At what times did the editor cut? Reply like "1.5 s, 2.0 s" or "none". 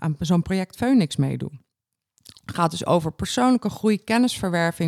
none